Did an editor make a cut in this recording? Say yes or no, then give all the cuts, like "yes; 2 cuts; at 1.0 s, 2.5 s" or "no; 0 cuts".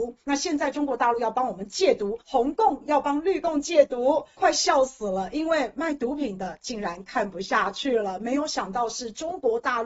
yes; 1 cut; at 2.2 s